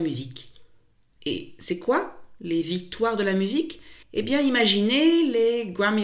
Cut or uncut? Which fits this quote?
cut